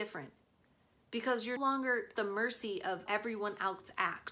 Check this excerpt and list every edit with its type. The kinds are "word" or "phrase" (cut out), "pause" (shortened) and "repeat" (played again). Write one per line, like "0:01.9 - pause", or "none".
0:01.6 - word
0:02.2 - word
0:03.1 - word